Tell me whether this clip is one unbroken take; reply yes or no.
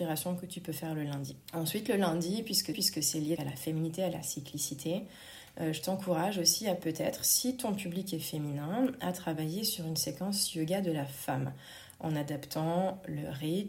no